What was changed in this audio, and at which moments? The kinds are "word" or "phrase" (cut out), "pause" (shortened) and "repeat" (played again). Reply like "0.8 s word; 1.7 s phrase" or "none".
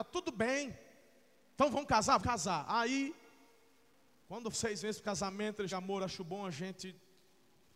2.2 s word; 4.5 s word; 5.7 s word